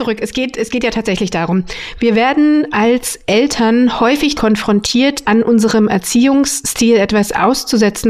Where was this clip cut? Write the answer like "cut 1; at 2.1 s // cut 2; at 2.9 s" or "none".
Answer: cut 1; at 4.4 s // cut 2; at 5.2 s